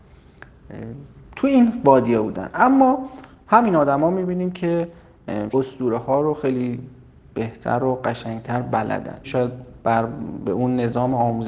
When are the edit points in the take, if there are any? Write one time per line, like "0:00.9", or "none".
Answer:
0:05.5
0:09.2

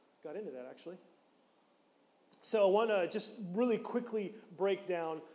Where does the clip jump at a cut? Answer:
none

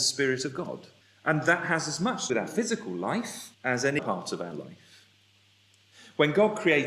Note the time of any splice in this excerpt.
0:01.0
0:02.3
0:03.5
0:04.0

